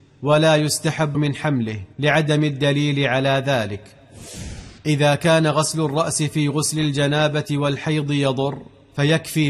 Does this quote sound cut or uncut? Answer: cut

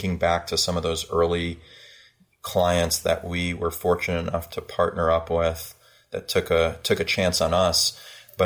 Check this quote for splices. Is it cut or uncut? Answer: uncut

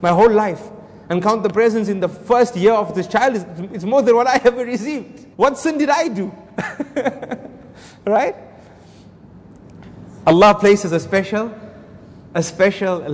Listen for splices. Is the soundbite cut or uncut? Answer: cut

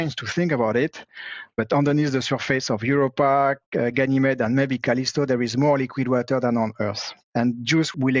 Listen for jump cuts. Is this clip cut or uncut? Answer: cut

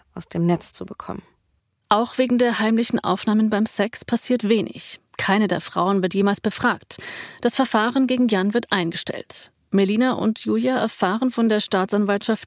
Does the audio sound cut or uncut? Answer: uncut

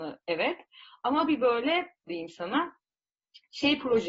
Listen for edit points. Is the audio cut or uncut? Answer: cut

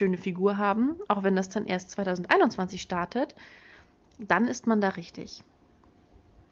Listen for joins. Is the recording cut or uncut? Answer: uncut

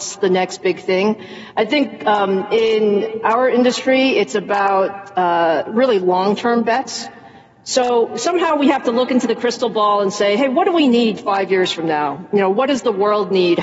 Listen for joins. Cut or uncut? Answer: uncut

